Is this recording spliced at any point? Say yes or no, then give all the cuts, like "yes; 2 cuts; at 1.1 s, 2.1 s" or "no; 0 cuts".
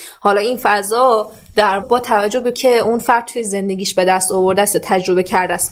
yes; 2 cuts; at 1.8 s, 2.5 s